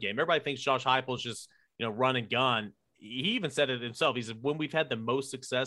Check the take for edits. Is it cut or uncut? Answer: uncut